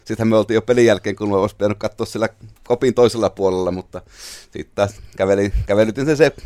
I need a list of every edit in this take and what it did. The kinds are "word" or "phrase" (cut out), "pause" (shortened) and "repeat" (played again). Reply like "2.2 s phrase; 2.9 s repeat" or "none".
2.6 s pause